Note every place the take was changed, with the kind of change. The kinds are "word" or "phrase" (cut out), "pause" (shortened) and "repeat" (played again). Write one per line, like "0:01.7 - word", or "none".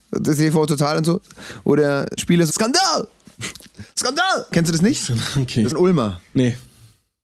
0:02.2 - word
0:02.5 - word
0:05.7 - word